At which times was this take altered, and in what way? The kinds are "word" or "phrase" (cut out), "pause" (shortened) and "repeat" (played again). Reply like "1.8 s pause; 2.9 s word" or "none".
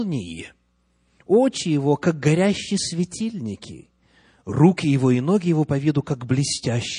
none

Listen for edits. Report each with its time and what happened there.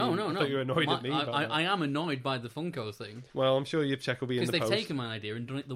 3.3 s pause

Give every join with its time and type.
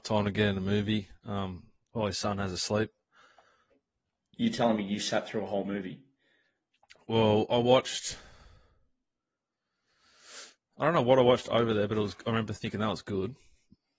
1.2 s pause

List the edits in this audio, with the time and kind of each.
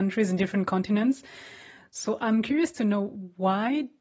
none

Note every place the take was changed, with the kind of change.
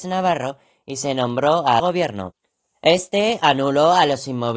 1.8 s phrase

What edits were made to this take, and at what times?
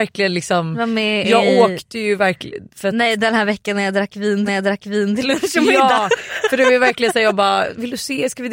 4.5 s repeat

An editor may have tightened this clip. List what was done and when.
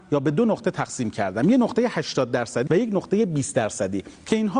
2.7 s word

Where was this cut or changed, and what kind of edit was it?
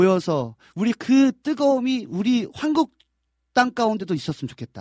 none

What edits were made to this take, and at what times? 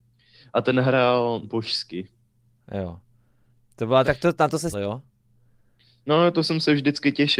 1.4 s word; 4.0 s word; 4.7 s word

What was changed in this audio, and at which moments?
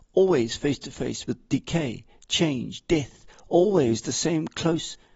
none

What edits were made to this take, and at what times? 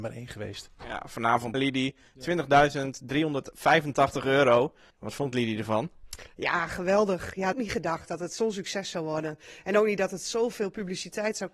1.5 s phrase; 4.9 s pause; 7.5 s phrase

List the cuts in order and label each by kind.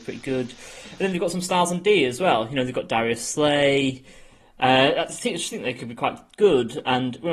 none

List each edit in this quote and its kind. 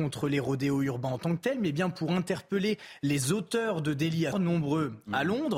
4.3 s word

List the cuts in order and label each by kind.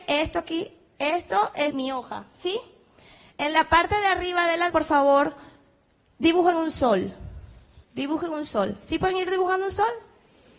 1.7 s word; 4.7 s word; 7.8 s pause

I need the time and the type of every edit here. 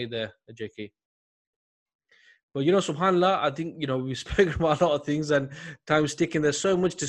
none

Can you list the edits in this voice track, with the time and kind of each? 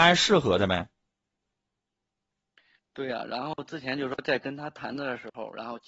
none

